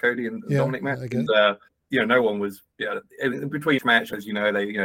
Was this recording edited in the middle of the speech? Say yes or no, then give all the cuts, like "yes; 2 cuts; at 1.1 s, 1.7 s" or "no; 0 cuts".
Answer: yes; 4 cuts; at 1.3 s, 1.7 s, 2.7 s, 3.8 s